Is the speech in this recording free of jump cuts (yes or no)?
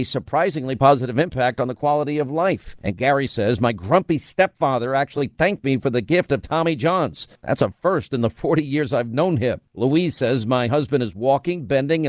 yes